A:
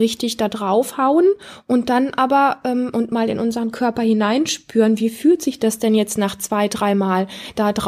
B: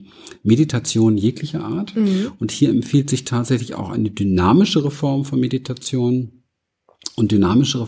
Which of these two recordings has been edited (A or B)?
A